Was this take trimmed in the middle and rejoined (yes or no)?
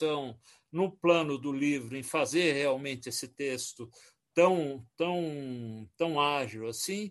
no